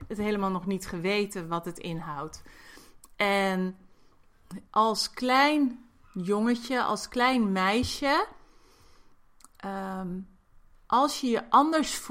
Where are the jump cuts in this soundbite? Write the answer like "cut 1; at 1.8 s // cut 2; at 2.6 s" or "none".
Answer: cut 1; at 4.7 s